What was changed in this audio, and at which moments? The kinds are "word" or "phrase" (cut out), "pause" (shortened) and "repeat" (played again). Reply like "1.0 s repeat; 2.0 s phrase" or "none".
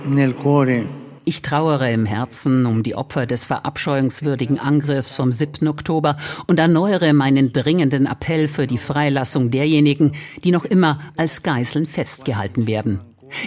1.2 s pause